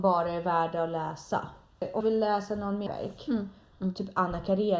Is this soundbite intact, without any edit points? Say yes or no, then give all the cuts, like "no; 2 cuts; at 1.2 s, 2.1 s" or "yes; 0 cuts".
no; 3 cuts; at 2.0 s, 2.9 s, 3.7 s